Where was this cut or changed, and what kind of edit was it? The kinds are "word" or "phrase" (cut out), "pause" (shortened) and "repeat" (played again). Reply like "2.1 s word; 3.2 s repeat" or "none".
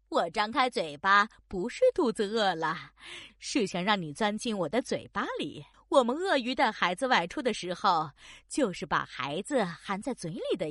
5.7 s pause

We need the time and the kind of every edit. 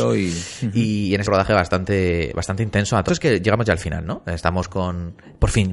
1.3 s phrase; 3.1 s phrase

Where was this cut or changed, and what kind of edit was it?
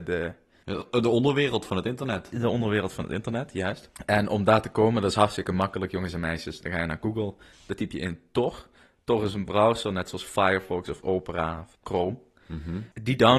none

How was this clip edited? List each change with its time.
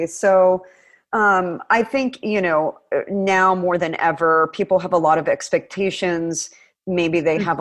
none

